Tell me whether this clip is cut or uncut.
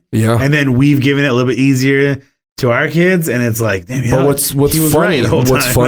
uncut